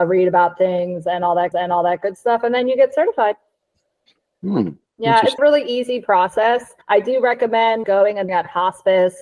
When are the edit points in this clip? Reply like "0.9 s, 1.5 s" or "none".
1.5 s, 4.9 s, 5.4 s, 6.8 s, 7.8 s, 8.3 s